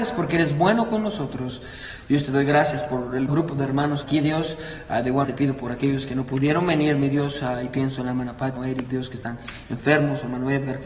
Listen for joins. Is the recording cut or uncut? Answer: cut